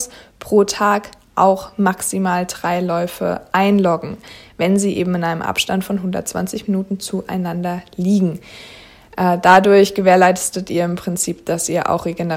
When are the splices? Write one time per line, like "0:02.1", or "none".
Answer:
none

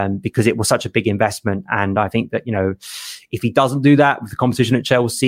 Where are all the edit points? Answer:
none

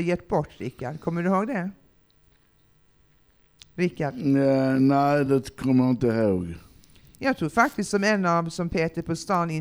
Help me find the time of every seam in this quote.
none

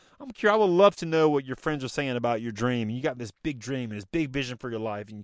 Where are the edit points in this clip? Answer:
none

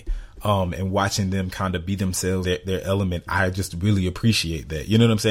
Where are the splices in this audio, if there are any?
0:02.4

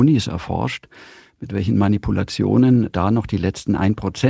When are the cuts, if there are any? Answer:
none

